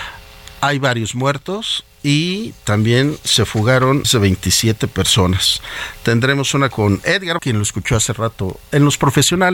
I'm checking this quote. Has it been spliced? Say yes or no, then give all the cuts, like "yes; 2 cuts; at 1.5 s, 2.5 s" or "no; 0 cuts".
yes; 3 cuts; at 4.0 s, 6.7 s, 7.4 s